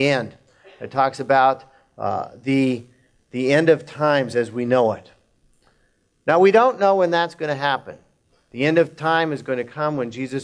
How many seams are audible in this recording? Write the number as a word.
zero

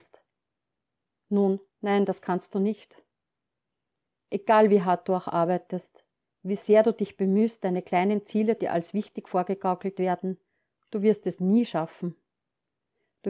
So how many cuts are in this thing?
two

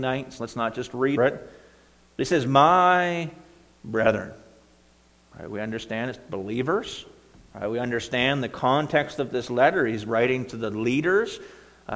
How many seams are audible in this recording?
one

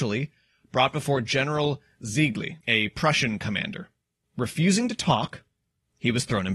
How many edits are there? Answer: one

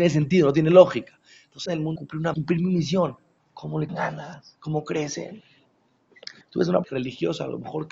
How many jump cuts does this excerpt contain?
seven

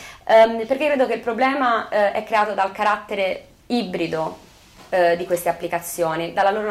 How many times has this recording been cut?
one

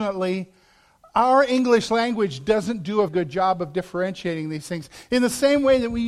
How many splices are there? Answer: one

